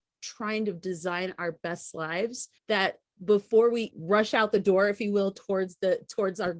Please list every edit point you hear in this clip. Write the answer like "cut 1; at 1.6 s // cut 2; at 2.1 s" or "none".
cut 1; at 2.6 s // cut 2; at 3.9 s